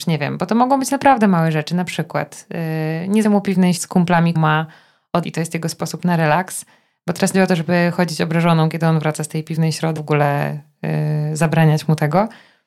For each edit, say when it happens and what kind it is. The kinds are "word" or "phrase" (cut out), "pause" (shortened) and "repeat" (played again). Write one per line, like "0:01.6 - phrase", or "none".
0:03.2 - word
0:03.8 - word
0:04.3 - word
0:05.2 - word
0:07.3 - word
0:10.0 - word